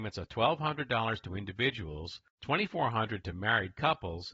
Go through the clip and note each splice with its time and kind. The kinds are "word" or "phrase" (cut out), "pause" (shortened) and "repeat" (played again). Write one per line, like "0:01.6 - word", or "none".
0:02.3 - pause